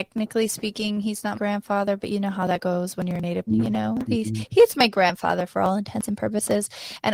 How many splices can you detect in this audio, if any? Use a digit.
2